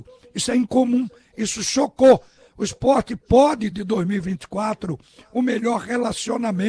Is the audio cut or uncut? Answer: cut